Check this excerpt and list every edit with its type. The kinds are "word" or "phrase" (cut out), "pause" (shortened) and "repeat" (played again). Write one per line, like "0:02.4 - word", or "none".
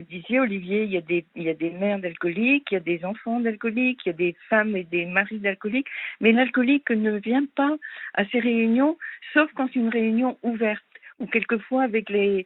0:09.7 - word